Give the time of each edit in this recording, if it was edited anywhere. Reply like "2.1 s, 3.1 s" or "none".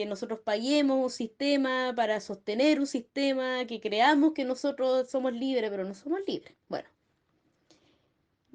6.6 s